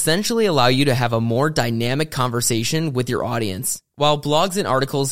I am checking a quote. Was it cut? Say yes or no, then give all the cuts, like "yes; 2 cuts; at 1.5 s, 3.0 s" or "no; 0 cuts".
yes; 1 cut; at 3.9 s